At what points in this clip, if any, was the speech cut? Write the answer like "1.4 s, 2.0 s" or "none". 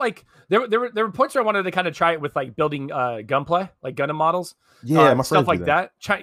none